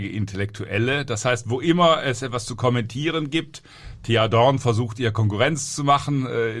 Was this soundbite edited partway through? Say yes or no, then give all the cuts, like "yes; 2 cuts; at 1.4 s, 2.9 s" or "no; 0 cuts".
no; 0 cuts